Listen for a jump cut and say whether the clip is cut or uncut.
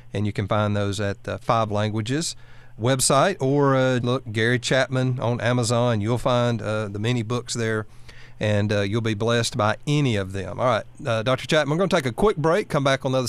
cut